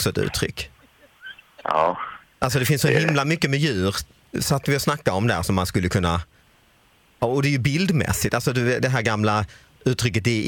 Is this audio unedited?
yes; 0 cuts

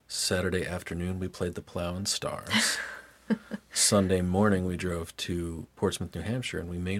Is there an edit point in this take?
no; 0 cuts

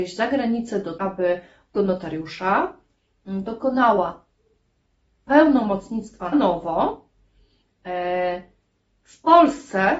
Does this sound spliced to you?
yes; 4 cuts; at 1.0 s, 1.7 s, 6.3 s, 9.0 s

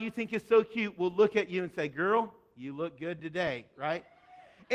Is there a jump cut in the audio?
no; 0 cuts

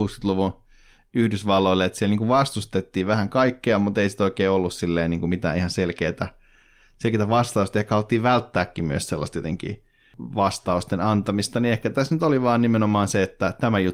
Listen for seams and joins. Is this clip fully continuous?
yes; 0 cuts

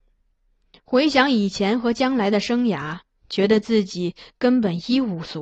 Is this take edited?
no; 0 cuts

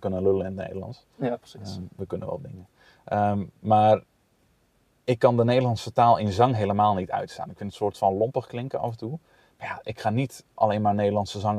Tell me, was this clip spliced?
no; 0 cuts

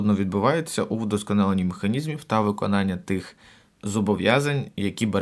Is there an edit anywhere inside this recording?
no; 0 cuts

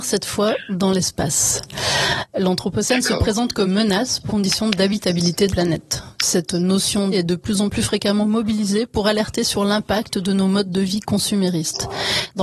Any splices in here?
yes; 4 cuts; at 3.6 s, 4.3 s, 5.5 s, 7.1 s

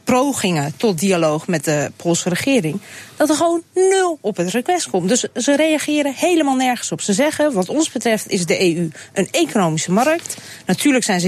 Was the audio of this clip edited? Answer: no; 0 cuts

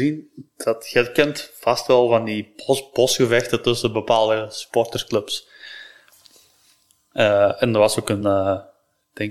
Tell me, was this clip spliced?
no; 0 cuts

